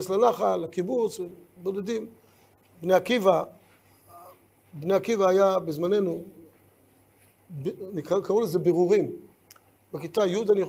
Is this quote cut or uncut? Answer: uncut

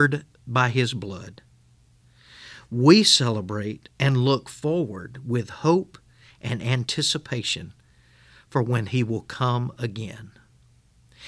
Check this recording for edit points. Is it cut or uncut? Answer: uncut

